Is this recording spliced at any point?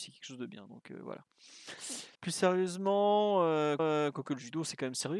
yes; 2 cuts; at 2.1 s, 3.8 s

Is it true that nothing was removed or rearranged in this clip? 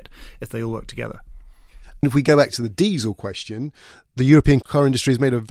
yes; 0 cuts

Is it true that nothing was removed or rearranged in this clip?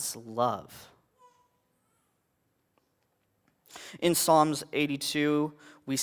yes; 0 cuts

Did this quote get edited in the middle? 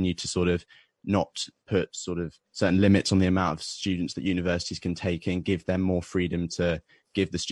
yes; 1 cut; at 2.4 s

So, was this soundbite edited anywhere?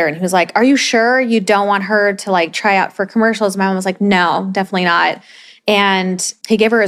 no; 0 cuts

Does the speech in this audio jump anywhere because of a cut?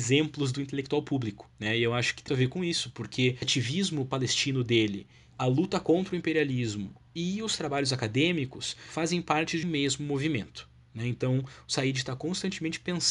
yes; 3 cuts; at 2.3 s, 3.4 s, 9.6 s

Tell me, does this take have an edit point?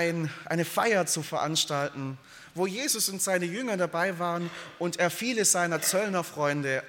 no; 0 cuts

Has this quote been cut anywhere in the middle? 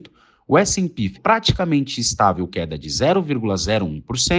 yes; 2 cuts; at 1.1 s, 2.5 s

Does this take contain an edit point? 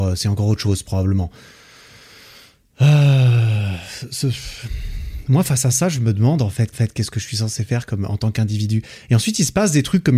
yes; 1 cut; at 6.7 s

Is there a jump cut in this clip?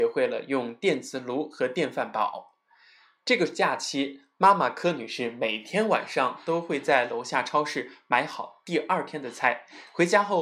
no; 0 cuts

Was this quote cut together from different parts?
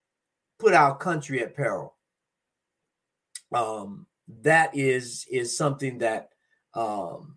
no; 0 cuts

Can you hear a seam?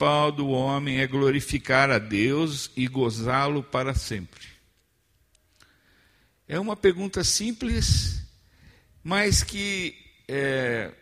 no; 0 cuts

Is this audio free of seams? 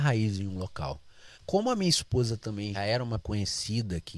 no; 3 cuts; at 1.3 s, 2.7 s, 3.2 s

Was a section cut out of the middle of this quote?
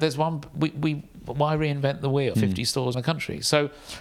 yes; 2 cuts; at 2.3 s, 2.9 s

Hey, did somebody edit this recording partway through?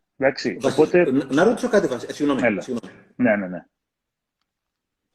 no; 0 cuts

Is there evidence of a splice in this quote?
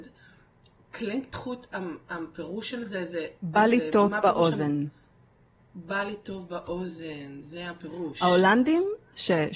no; 0 cuts

